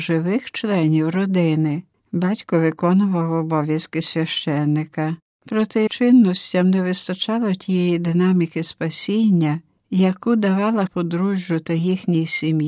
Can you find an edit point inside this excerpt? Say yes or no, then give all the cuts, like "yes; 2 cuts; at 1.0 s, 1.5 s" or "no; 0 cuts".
yes; 2 cuts; at 5.9 s, 10.9 s